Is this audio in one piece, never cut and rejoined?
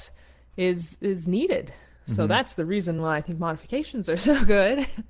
yes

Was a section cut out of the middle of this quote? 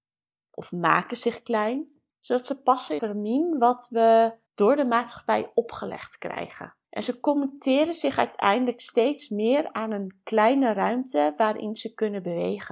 yes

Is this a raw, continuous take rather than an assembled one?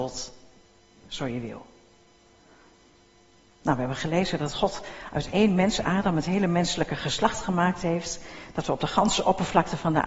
no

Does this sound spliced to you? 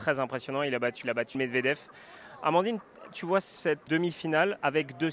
yes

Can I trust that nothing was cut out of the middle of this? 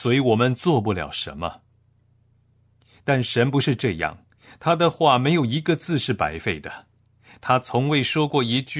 yes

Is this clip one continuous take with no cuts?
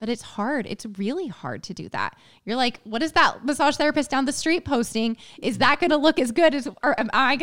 yes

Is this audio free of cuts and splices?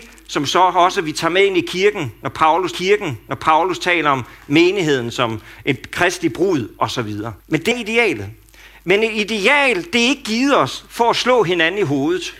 no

